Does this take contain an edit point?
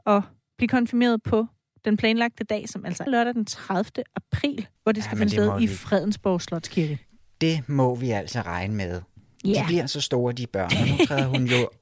yes; 2 cuts; at 3.1 s, 4.8 s

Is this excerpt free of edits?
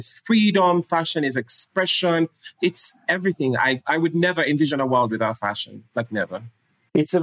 yes; 0 cuts

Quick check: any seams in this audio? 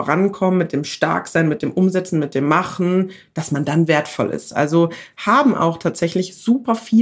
no; 0 cuts

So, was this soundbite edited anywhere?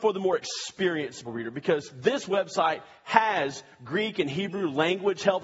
yes; 1 cut; at 1.2 s

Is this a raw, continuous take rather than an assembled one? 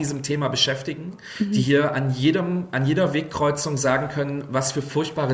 yes; 0 cuts

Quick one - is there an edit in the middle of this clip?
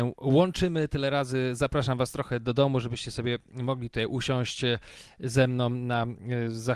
no; 0 cuts

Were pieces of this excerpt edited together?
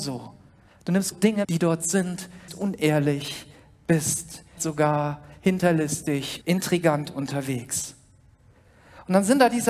yes; 5 cuts; at 1.1 s, 1.4 s, 2.5 s, 4.6 s, 6.4 s

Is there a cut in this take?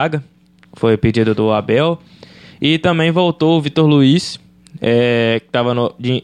no; 0 cuts

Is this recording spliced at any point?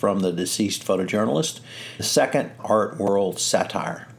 yes; 2 cuts; at 2.0 s, 2.6 s

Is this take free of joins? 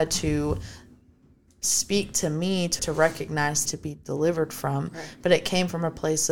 no; 2 cuts; at 2.8 s, 3.7 s

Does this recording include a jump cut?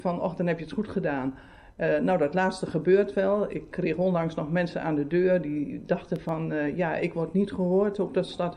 no; 0 cuts

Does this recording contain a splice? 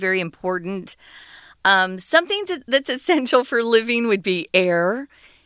no; 0 cuts

